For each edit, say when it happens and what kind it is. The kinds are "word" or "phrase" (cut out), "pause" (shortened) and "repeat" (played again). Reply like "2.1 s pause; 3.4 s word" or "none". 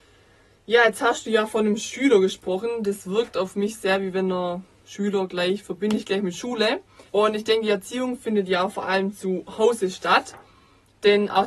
7.1 s pause